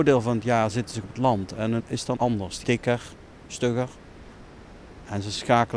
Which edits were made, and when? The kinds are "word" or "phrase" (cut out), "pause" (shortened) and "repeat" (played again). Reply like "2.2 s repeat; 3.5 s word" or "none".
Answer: 1.0 s word; 1.8 s word; 2.2 s word; 2.6 s word